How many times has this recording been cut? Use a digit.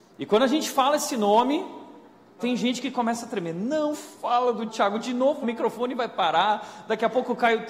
4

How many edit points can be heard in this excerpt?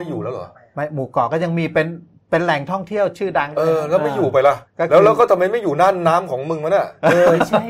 1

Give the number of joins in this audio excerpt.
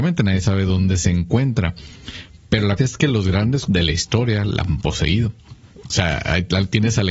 2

